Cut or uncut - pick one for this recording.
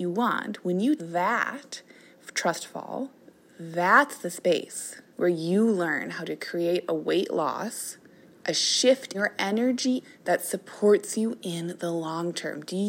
cut